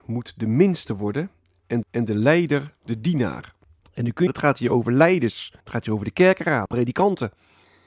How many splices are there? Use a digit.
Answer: 5